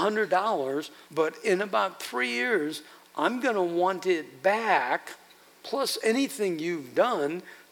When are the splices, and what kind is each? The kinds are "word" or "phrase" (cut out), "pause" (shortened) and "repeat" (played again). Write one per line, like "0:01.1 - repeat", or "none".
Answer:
0:01.0 - pause